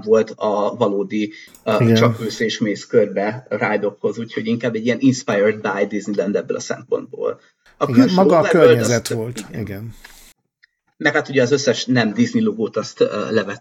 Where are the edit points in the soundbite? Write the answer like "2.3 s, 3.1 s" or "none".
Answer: none